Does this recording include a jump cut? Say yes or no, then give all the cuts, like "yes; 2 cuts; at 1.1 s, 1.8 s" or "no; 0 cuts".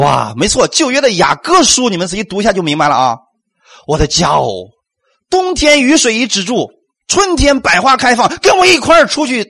no; 0 cuts